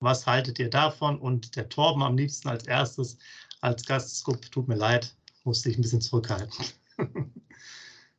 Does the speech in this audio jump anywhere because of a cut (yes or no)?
no